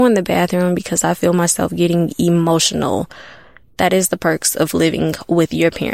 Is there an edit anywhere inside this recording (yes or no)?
no